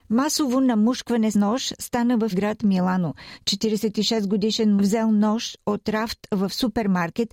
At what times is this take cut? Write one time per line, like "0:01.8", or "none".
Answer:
0:01.3
0:02.3
0:04.8